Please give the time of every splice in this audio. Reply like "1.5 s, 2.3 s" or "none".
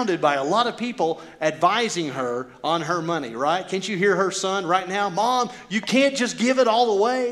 none